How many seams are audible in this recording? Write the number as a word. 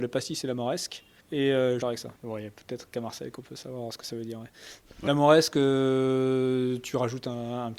four